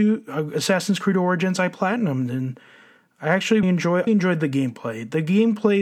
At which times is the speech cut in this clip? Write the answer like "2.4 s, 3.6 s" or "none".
3.6 s, 4.1 s